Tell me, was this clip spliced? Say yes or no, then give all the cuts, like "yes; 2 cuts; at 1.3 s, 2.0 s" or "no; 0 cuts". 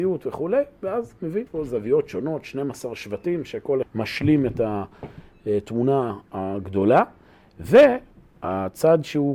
yes; 2 cuts; at 1.5 s, 3.8 s